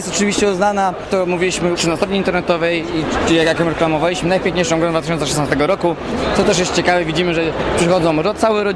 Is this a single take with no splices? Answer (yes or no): no